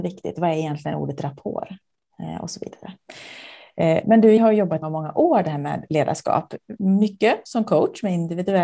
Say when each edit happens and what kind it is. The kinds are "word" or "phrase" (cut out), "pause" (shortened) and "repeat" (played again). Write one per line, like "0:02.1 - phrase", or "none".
0:04.4 - word
0:04.8 - word